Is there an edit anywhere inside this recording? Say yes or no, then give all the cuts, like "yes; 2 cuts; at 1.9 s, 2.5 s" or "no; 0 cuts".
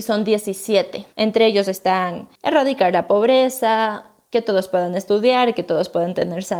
yes; 2 cuts; at 1.1 s, 2.4 s